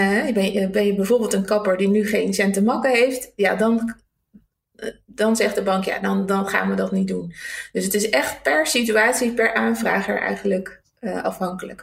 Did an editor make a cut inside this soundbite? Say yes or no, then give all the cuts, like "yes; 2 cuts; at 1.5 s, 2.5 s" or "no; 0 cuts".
no; 0 cuts